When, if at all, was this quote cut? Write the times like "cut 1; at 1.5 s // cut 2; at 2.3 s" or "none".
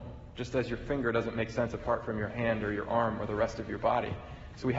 none